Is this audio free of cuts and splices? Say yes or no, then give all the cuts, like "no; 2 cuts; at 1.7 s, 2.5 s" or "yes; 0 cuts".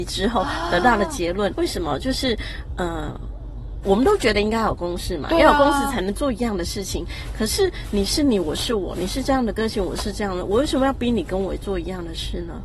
no; 2 cuts; at 1.5 s, 3.8 s